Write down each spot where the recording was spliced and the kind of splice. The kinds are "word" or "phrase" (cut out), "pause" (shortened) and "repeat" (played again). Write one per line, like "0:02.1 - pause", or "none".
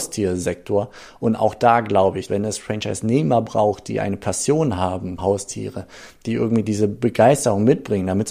0:02.3 - word
0:05.2 - word